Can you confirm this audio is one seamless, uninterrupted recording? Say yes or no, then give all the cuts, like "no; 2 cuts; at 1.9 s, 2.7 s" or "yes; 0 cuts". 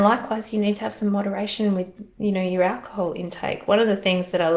yes; 0 cuts